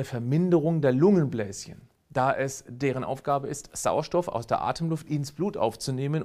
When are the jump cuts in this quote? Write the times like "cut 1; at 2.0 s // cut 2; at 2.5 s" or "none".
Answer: none